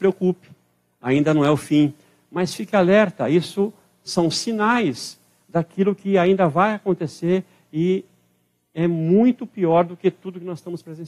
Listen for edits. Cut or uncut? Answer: uncut